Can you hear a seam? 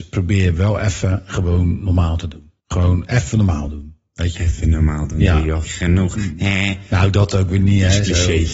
yes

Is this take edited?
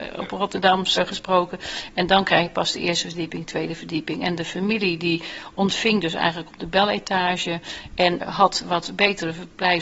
yes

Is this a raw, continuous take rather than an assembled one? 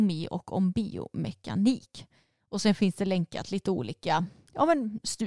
yes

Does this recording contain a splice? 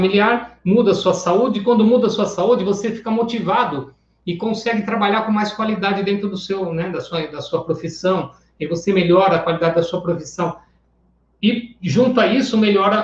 no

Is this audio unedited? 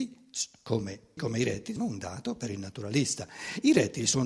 no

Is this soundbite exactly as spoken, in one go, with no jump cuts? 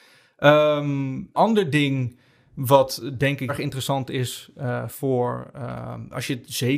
no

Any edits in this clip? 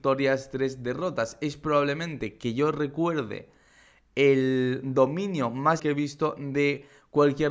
yes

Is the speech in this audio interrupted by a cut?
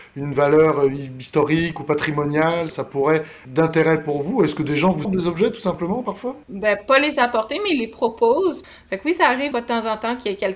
yes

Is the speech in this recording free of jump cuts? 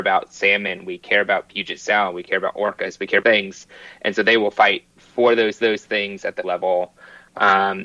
no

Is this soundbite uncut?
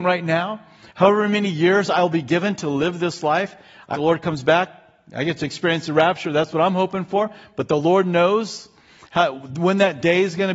no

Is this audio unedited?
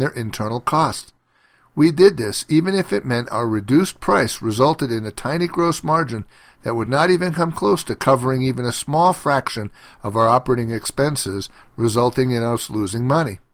yes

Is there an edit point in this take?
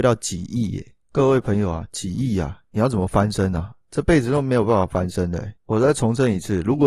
yes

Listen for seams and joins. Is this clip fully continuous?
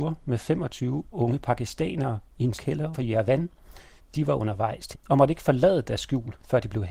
no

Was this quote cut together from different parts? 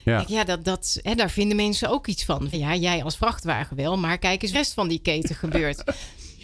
yes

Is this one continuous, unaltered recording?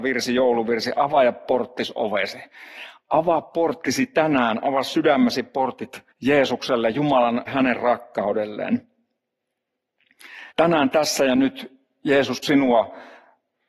no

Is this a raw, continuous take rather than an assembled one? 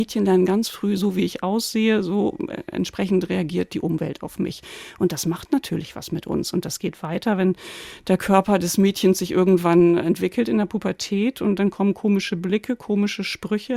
yes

